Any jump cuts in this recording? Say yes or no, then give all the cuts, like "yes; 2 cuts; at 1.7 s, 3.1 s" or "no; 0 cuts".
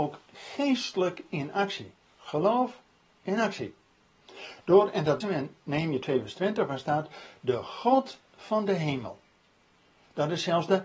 yes; 1 cut; at 5.2 s